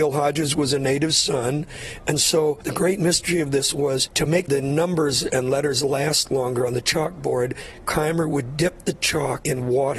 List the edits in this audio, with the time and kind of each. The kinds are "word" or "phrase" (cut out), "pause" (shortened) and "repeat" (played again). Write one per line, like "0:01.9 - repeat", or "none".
none